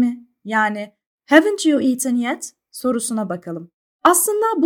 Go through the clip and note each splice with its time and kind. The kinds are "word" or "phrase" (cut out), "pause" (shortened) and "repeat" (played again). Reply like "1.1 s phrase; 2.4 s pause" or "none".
none